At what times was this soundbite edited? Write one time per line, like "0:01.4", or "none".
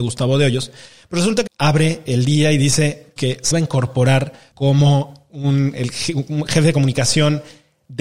0:01.5
0:02.1
0:03.2
0:03.5
0:04.5